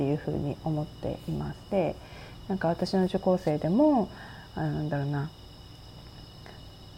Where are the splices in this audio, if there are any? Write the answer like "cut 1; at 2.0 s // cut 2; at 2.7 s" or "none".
cut 1; at 1.6 s